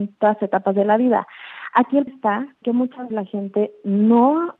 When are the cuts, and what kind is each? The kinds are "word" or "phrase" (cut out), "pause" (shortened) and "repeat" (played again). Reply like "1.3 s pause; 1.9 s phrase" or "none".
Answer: 2.1 s word; 2.6 s word; 3.1 s word